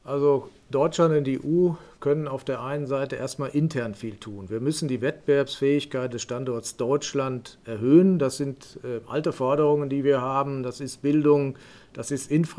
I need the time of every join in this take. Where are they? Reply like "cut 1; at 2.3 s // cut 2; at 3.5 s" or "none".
none